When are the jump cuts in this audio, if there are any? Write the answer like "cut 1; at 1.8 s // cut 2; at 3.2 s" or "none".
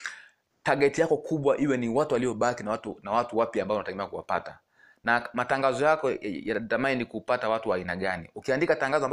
none